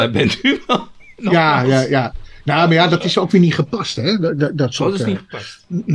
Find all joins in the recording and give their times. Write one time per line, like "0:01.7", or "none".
none